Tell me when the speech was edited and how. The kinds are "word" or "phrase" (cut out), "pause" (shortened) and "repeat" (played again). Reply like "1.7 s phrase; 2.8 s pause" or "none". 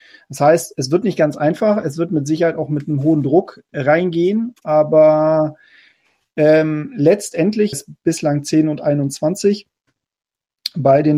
7.7 s word